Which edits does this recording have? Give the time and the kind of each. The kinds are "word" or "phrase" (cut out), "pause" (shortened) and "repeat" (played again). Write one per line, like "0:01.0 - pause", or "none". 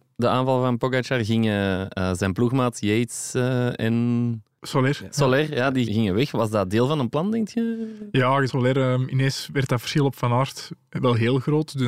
0:05.9 - word
0:08.5 - phrase